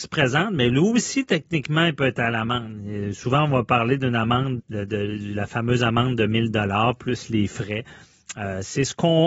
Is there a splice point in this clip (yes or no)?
yes